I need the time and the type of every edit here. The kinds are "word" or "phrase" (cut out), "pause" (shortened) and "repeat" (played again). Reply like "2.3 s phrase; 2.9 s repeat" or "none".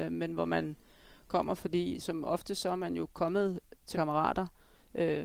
2.0 s word; 3.9 s phrase